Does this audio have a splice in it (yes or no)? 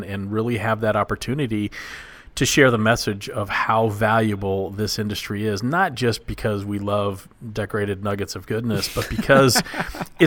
no